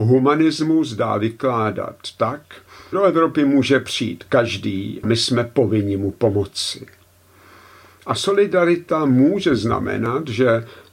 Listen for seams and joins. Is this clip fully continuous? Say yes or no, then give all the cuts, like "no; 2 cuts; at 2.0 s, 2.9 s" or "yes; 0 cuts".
no; 2 cuts; at 2.9 s, 5.0 s